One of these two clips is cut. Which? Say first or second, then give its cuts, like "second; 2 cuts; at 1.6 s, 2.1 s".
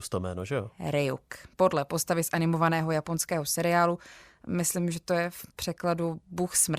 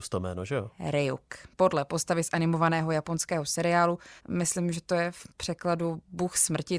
second; 1 cut; at 4.2 s